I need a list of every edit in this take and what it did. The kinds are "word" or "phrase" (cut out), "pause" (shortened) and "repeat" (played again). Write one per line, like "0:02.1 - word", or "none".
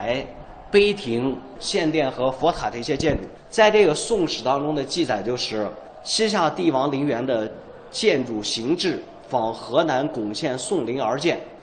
0:01.6 - phrase